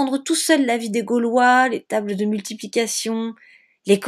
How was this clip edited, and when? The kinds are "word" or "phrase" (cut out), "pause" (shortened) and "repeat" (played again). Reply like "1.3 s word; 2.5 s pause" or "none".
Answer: none